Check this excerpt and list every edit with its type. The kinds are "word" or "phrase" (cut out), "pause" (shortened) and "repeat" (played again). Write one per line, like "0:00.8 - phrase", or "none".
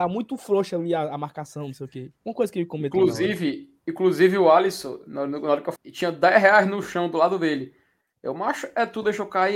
0:05.8 - phrase